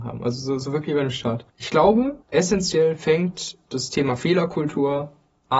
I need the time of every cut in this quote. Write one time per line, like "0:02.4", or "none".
0:01.5
0:02.2